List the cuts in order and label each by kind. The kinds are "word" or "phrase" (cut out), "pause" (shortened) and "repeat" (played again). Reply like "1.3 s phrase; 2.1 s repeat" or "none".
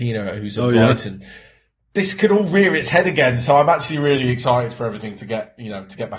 none